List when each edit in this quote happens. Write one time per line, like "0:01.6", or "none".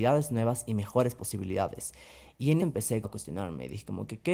0:02.6
0:03.0